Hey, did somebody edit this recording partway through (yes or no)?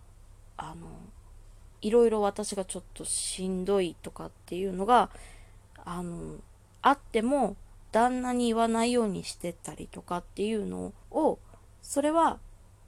yes